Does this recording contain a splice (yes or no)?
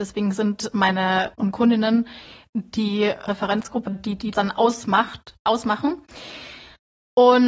yes